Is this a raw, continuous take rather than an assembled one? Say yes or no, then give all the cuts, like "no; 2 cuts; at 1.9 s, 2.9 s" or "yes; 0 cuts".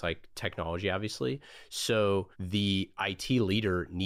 no; 1 cut; at 2.3 s